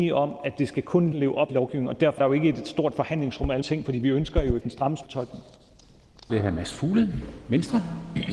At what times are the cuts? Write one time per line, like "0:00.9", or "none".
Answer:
0:01.1
0:01.5
0:02.2
0:03.6
0:04.6
0:05.0
0:06.3